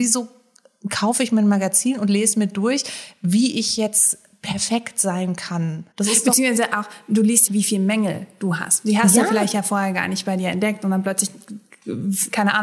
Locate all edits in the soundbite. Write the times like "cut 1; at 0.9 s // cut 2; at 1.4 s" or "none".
cut 1; at 5.9 s // cut 2; at 7.5 s